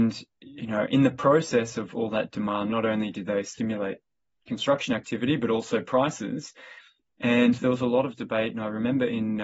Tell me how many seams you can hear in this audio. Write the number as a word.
zero